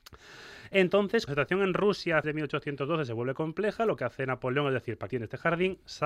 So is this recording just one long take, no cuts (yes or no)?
no